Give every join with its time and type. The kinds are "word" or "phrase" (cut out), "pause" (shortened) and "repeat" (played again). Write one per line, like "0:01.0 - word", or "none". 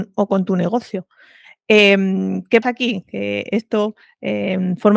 0:02.6 - word